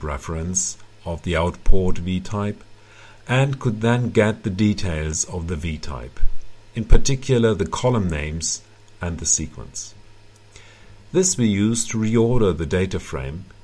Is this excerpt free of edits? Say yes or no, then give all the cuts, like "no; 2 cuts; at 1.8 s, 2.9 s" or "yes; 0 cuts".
yes; 0 cuts